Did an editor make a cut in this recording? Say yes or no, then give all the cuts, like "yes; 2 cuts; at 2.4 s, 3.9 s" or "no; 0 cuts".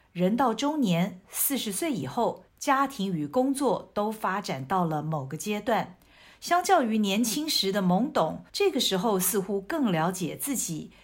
yes; 2 cuts; at 2.5 s, 8.5 s